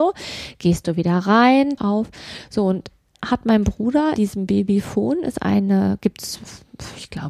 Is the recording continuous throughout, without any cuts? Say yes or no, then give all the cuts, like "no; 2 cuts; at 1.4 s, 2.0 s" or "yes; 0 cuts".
no; 3 cuts; at 1.8 s, 3.1 s, 4.2 s